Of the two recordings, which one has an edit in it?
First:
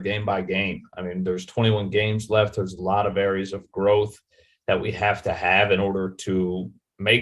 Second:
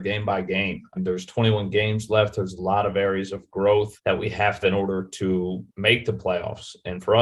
second; 4 cuts; at 1.0 s, 4.0 s, 4.6 s, 5.7 s

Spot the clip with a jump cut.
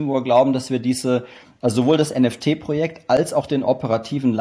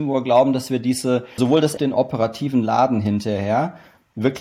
second; 2 cuts; at 1.4 s, 1.8 s

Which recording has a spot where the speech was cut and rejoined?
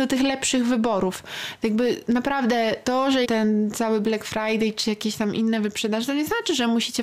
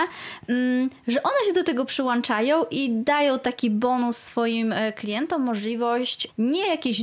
first; 1 cut; at 3.2 s

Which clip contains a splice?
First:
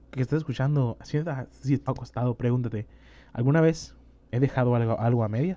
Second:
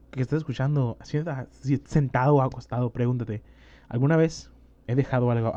first; 1 cut; at 1.9 s

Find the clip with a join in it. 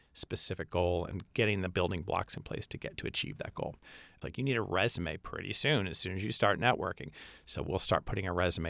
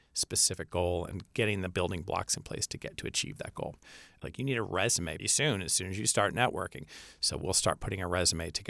second; 1 cut; at 5.2 s

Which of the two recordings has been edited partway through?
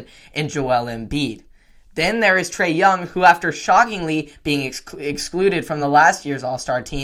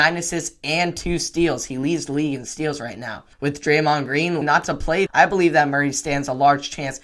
second; 3 cuts; at 3.3 s, 4.4 s, 5.1 s

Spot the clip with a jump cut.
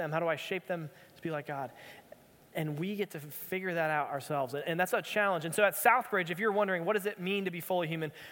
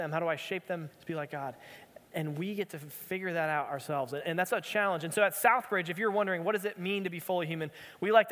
second; 2 cuts; at 0.9 s, 2.0 s

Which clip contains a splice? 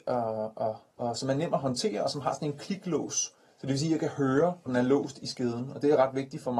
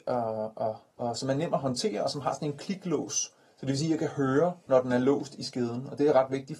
first; 1 cut; at 4.7 s

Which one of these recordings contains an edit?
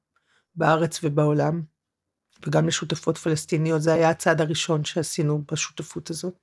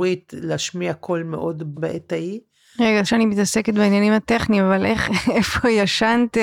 second; 2 cuts; at 1.7 s, 3.1 s

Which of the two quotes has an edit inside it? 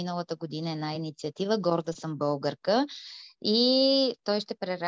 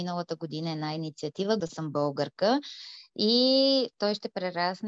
second; 1 cut; at 1.6 s

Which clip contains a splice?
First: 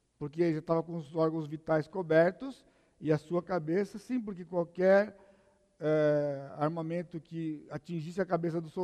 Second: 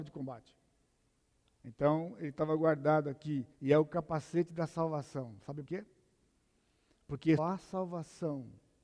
second; 3 cuts; at 3.5 s, 5.6 s, 7.4 s

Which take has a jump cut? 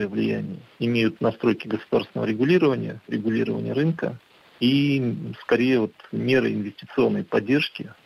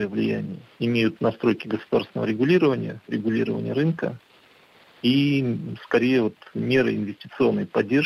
first; 1 cut; at 4.4 s

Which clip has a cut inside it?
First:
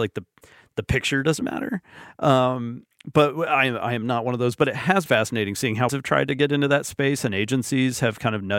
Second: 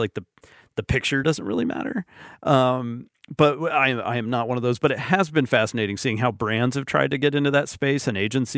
first; 3 cuts; at 1.4 s, 5.1 s, 5.9 s

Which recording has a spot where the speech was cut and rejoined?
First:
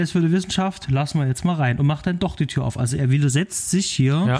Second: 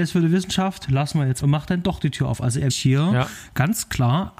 second; 2 cuts; at 1.4 s, 2.7 s

